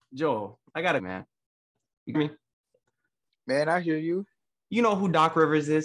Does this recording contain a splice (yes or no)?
yes